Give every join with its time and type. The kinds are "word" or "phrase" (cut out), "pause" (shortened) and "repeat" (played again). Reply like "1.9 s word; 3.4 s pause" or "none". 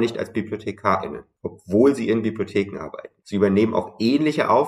3.2 s pause